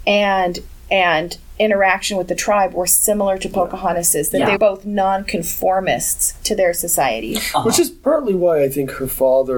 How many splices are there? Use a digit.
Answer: 1